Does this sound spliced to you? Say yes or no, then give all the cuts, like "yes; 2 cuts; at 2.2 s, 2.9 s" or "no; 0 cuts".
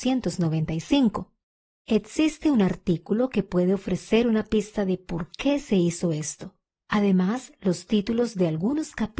no; 0 cuts